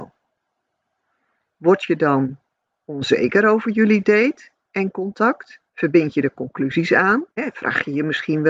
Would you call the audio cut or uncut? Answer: cut